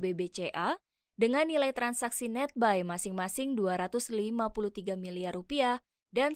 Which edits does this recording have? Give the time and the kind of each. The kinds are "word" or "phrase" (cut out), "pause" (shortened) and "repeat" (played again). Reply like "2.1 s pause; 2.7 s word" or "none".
none